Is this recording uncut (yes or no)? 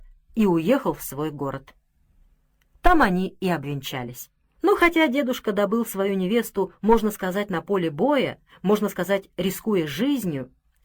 yes